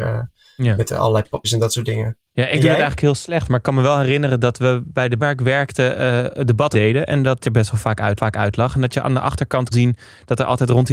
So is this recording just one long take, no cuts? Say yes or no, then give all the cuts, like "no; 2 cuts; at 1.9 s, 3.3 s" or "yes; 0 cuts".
no; 7 cuts; at 1.4 s, 2.3 s, 5.2 s, 6.7 s, 7.4 s, 8.2 s, 9.7 s